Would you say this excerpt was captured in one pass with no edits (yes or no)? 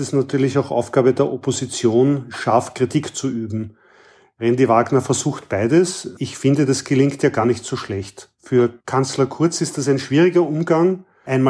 yes